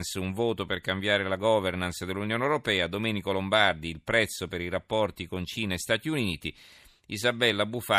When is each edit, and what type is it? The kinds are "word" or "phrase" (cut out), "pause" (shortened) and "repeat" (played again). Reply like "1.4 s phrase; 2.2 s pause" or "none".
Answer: none